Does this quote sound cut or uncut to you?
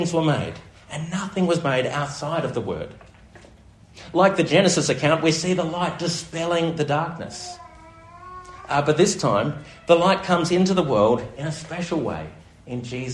uncut